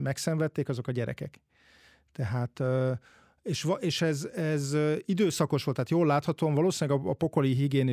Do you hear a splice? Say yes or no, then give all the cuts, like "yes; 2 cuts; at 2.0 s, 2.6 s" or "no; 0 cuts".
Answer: no; 0 cuts